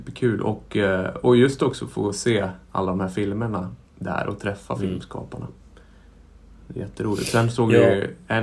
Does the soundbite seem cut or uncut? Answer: cut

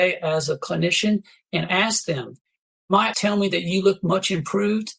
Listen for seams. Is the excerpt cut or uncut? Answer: cut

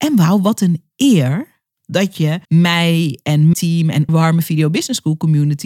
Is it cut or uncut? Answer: cut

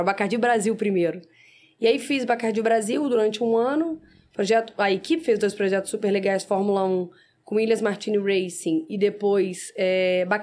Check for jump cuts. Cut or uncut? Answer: uncut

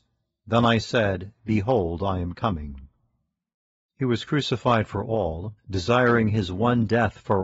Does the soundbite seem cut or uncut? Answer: cut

